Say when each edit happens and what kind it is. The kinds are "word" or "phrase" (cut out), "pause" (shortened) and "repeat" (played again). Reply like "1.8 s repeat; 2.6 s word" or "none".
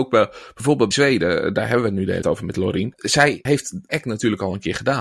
0.9 s word; 2.2 s word; 3.9 s word